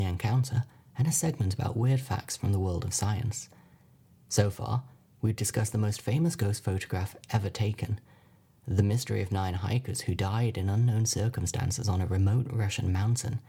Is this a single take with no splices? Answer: yes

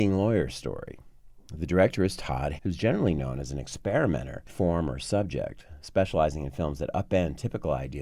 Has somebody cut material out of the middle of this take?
yes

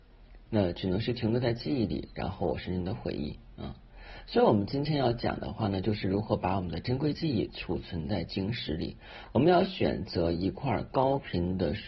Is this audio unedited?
yes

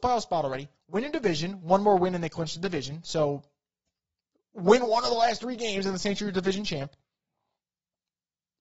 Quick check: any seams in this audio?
no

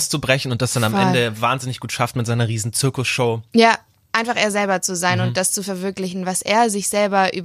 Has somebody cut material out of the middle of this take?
no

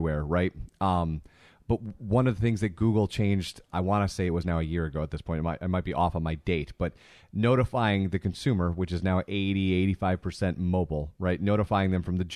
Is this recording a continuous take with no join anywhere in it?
yes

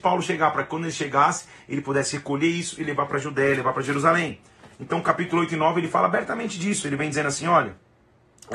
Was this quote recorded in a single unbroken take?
yes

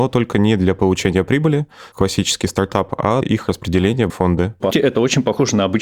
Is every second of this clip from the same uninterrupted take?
no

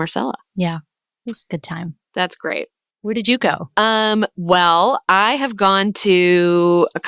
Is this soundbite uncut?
yes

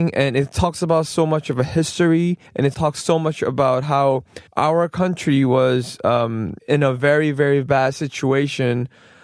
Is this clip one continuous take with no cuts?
no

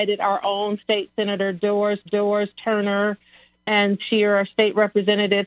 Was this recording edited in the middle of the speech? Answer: yes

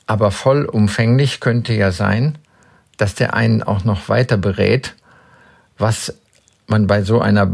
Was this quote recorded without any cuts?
yes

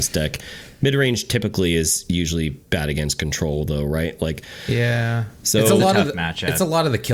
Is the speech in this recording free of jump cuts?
no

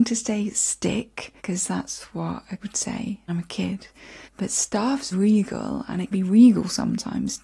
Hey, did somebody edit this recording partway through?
yes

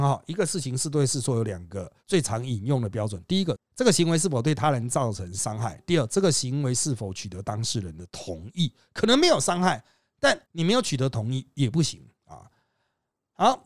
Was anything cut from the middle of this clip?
yes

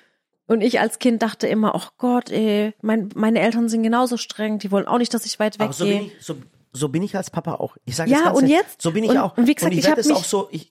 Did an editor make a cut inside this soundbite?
no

